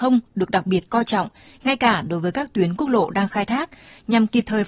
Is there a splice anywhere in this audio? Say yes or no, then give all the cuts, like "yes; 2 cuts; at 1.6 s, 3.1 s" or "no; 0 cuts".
no; 0 cuts